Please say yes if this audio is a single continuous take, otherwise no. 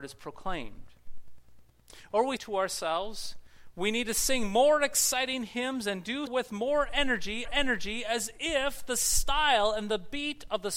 no